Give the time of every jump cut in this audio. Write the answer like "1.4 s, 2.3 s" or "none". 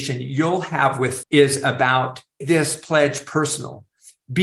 1.2 s, 2.4 s

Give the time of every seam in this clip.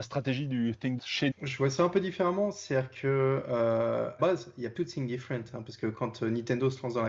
1.0 s, 1.3 s, 4.2 s, 4.8 s

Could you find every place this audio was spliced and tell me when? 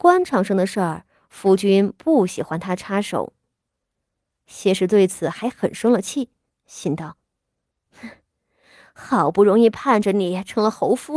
none

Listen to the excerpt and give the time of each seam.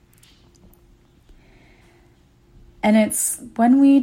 none

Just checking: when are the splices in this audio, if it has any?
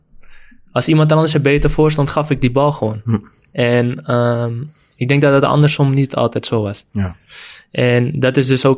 none

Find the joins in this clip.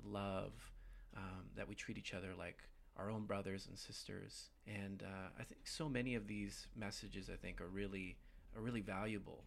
4.6 s

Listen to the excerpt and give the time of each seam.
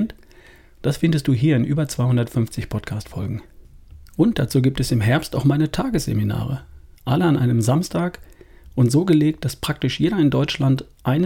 none

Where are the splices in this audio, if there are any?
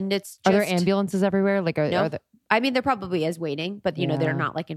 none

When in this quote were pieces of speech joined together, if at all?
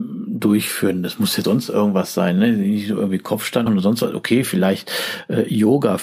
1.4 s, 3.7 s

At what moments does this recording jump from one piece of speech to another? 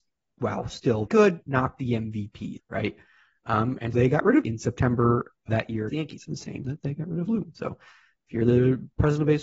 1.1 s, 2.6 s, 3.9 s, 4.4 s, 5.5 s, 5.9 s, 6.3 s, 6.6 s, 7.3 s

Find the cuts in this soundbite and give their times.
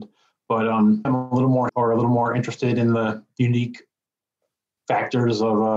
1.0 s, 1.7 s

